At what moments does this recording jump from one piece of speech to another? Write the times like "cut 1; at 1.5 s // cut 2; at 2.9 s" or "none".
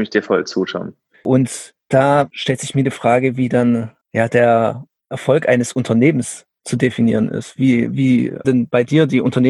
cut 1; at 1.8 s // cut 2; at 4.0 s // cut 3; at 8.4 s

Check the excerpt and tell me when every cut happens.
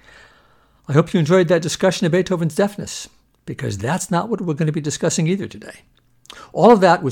none

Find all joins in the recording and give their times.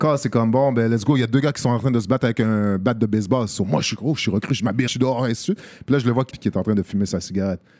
cut 1; at 4.9 s // cut 2; at 6.3 s

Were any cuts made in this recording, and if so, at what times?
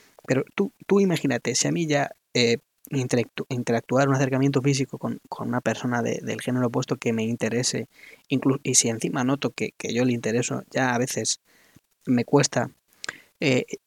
none

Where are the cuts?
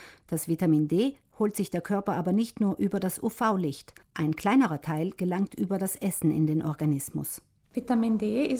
cut 1; at 4.0 s

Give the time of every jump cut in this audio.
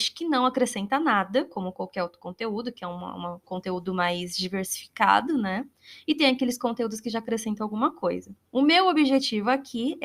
cut 1; at 3.4 s

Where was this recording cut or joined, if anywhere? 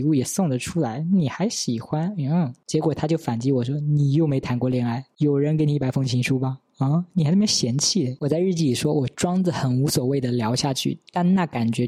none

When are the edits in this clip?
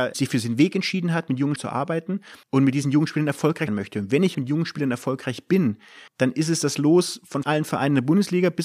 cut 1; at 1.6 s // cut 2; at 2.4 s // cut 3; at 3.7 s // cut 4; at 4.3 s // cut 5; at 6.1 s // cut 6; at 7.4 s

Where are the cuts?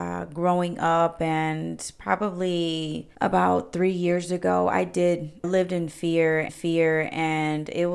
cut 1; at 3.1 s // cut 2; at 5.4 s // cut 3; at 6.5 s

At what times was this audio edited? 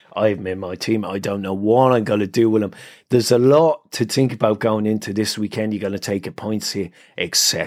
none

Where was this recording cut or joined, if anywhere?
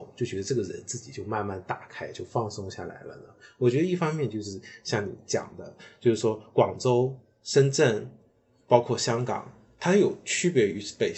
none

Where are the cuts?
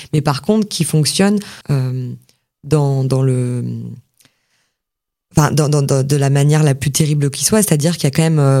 cut 1; at 1.6 s

